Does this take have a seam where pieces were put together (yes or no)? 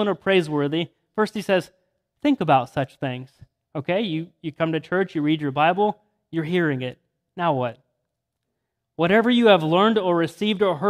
no